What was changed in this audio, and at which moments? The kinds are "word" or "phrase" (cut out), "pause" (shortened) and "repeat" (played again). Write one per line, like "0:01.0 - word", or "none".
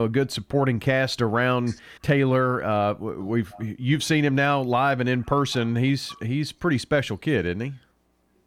0:02.0 - pause